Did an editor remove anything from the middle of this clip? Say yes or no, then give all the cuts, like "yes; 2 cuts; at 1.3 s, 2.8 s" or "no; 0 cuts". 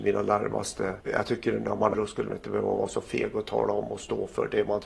yes; 3 cuts; at 1.0 s, 1.9 s, 2.3 s